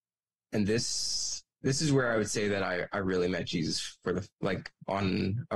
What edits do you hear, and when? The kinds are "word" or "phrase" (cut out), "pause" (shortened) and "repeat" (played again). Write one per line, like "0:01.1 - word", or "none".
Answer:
0:01.5 - pause
0:04.3 - pause